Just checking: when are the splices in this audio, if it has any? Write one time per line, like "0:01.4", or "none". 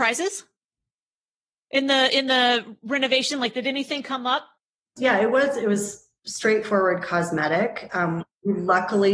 0:05.0
0:06.2